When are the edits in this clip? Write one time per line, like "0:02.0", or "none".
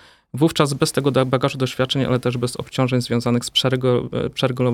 none